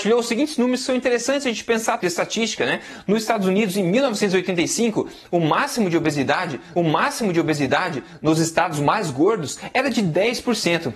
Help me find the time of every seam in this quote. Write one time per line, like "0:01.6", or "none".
0:02.0
0:06.8

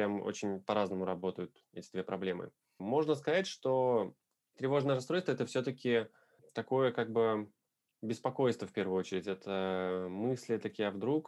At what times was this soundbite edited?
none

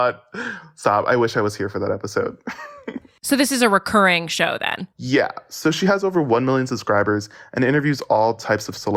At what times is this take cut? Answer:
0:04.9

